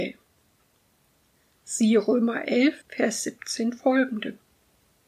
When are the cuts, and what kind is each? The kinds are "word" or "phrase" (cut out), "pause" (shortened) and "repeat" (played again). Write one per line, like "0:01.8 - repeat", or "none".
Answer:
0:02.8 - pause